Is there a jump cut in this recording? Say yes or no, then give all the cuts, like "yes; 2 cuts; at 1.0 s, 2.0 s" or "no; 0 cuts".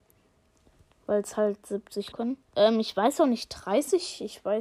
yes; 2 cuts; at 2.1 s, 2.5 s